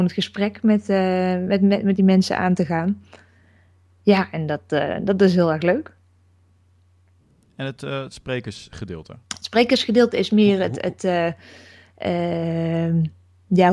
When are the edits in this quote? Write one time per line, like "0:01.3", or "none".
0:09.2